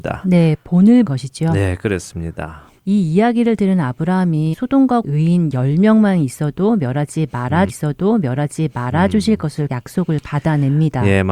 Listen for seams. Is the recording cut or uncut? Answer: cut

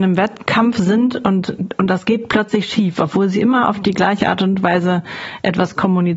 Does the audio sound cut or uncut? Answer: uncut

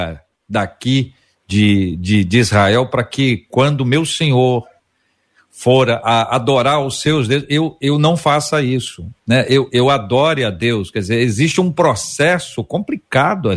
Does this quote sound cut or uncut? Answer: uncut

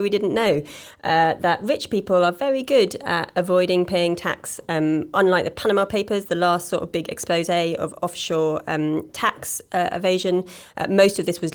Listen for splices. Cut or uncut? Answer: uncut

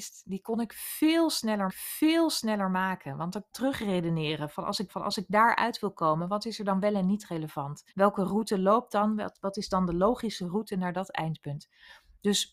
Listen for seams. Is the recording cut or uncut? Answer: cut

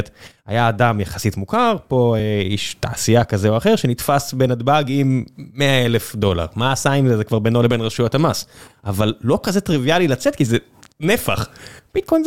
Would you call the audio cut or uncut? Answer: uncut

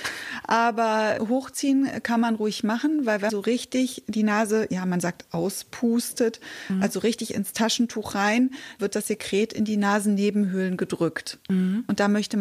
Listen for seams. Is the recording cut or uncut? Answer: cut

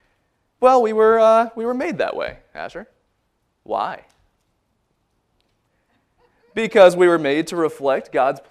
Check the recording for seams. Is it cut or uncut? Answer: uncut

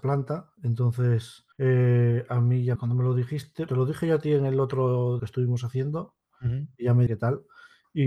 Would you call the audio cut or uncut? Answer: cut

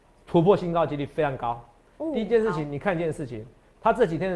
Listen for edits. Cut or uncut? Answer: uncut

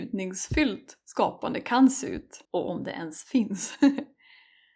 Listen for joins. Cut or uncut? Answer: cut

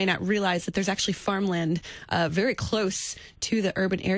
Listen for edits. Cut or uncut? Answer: uncut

